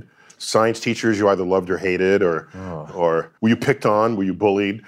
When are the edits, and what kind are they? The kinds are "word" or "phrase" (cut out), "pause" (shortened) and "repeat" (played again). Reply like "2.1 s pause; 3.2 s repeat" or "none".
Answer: 3.4 s pause